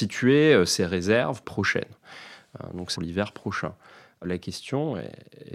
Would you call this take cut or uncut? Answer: cut